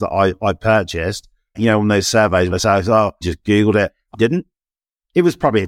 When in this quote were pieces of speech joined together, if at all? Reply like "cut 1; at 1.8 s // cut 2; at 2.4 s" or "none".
cut 1; at 1.5 s // cut 2; at 2.5 s // cut 3; at 3.2 s // cut 4; at 4.1 s